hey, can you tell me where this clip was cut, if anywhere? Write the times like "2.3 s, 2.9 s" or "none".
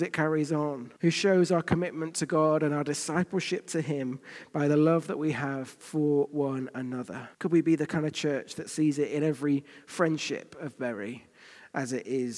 1.0 s, 7.3 s

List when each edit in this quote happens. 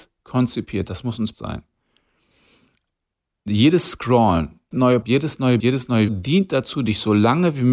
1.3 s, 4.7 s, 5.0 s, 5.6 s, 6.1 s

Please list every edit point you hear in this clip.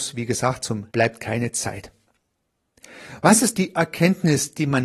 0.9 s, 3.5 s

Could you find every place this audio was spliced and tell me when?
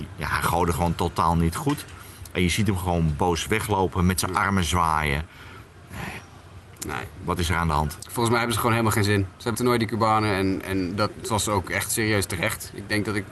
9.5 s

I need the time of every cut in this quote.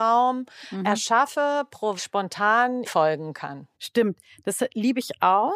2.0 s, 2.8 s, 3.7 s

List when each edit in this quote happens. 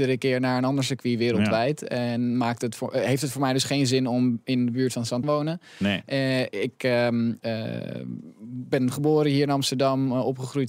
5.2 s

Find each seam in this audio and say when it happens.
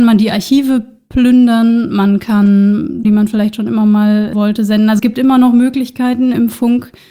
3.0 s, 4.3 s, 5.0 s

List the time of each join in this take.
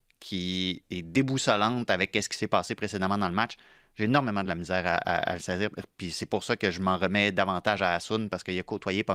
none

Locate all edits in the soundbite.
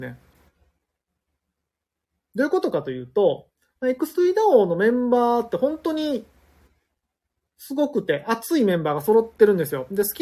none

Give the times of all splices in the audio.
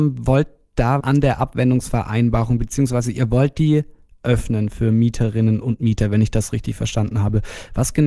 1.0 s

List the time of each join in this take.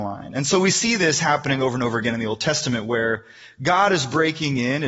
none

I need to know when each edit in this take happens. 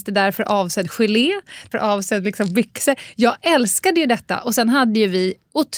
1.7 s

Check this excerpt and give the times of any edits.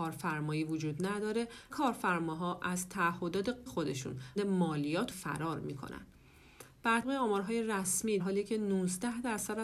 1.7 s, 3.7 s, 4.4 s, 5.1 s, 7.0 s, 8.2 s

